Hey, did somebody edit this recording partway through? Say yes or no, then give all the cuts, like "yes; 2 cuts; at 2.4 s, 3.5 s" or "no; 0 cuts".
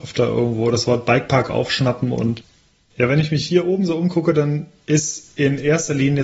no; 0 cuts